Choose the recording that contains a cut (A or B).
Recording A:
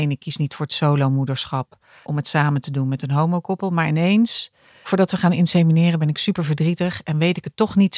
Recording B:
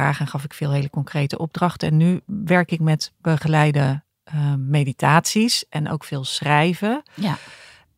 A